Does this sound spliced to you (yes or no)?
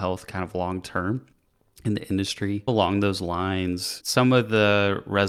no